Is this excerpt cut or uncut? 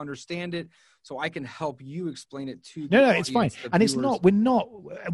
uncut